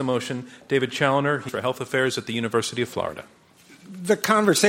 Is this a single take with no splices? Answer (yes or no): no